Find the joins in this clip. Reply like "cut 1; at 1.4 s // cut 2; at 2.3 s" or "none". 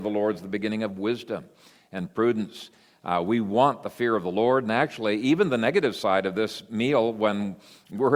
none